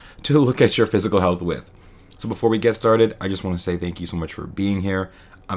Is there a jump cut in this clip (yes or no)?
no